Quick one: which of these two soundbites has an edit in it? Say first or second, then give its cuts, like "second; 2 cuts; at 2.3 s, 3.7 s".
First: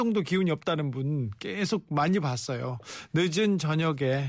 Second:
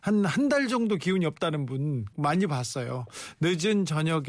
second; 1 cut; at 2.1 s